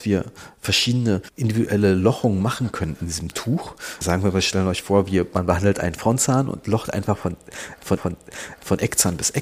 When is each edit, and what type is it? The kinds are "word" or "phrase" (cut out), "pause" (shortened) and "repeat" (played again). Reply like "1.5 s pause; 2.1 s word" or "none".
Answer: 4.0 s word; 8.0 s repeat